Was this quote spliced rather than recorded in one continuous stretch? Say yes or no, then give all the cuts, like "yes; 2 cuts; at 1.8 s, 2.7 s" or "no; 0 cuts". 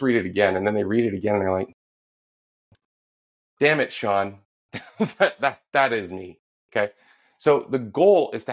no; 0 cuts